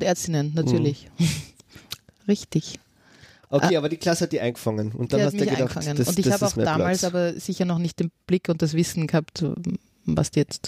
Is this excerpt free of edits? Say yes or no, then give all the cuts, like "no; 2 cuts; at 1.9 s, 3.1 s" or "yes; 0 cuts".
yes; 0 cuts